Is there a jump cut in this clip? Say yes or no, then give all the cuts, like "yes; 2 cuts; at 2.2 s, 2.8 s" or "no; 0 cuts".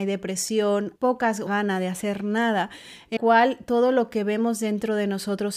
yes; 3 cuts; at 1.0 s, 1.5 s, 3.2 s